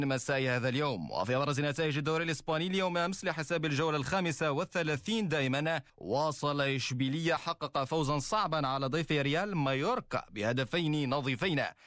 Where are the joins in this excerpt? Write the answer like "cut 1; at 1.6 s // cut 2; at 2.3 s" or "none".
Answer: cut 1; at 5.9 s // cut 2; at 7.4 s